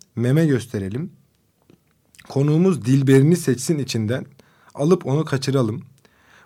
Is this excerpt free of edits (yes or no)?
yes